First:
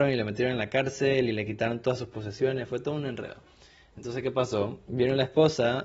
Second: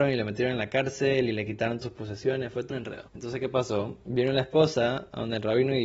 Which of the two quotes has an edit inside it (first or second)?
second